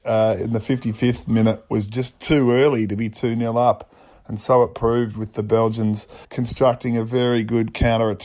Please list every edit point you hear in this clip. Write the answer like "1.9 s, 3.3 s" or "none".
6.2 s